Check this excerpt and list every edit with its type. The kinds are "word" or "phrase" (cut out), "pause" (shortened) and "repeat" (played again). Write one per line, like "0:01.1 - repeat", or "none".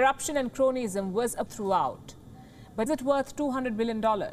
0:01.5 - phrase
0:02.9 - word